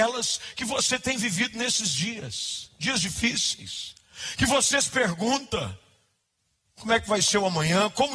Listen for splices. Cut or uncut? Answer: uncut